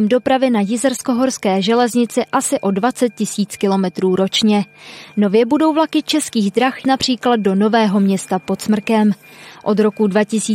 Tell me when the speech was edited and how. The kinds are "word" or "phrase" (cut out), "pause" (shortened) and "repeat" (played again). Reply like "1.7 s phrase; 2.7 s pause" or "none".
6.8 s word